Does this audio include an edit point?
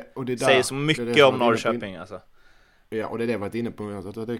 no; 0 cuts

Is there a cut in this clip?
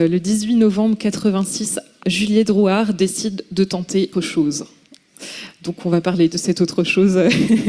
yes; 2 cuts; at 2.0 s, 4.1 s

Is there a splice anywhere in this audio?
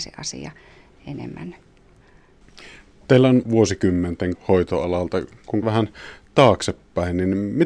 yes; 3 cuts; at 3.4 s, 4.3 s, 5.6 s

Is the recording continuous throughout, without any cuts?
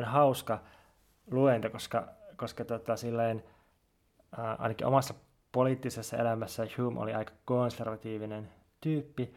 yes; 0 cuts

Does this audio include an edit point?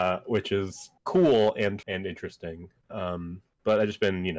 yes; 2 cuts; at 1.0 s, 1.8 s

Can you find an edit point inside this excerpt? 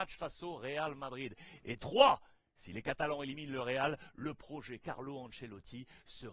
no; 0 cuts

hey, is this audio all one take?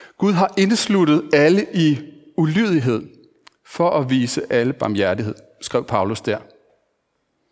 yes; 0 cuts

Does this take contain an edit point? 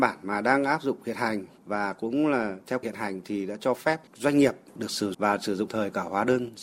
yes; 4 cuts; at 2.8 s, 4.1 s, 5.1 s, 5.7 s

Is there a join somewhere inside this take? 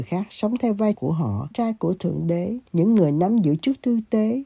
yes; 3 cuts; at 0.9 s, 1.5 s, 2.7 s

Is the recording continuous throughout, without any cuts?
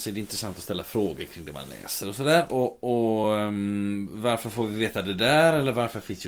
yes; 0 cuts

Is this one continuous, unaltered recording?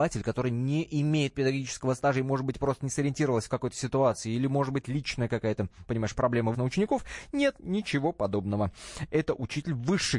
no; 1 cut; at 6.5 s

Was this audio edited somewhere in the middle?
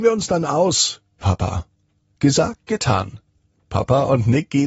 yes; 1 cut; at 1.2 s

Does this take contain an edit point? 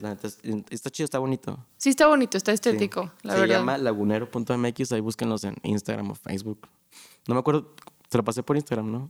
no; 0 cuts

